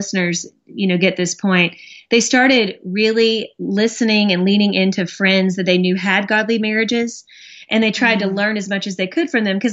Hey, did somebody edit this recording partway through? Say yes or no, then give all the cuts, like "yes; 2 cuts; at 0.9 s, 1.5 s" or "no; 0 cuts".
no; 0 cuts